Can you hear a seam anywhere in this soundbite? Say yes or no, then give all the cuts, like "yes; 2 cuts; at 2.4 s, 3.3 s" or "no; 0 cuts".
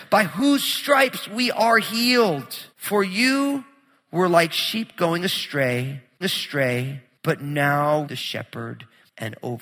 yes; 3 cuts; at 2.7 s, 6.2 s, 8.0 s